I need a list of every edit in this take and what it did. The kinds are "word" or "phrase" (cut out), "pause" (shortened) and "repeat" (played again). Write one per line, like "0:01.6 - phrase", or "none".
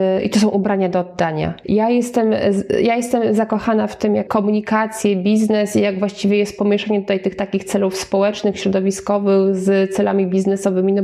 0:04.3 - phrase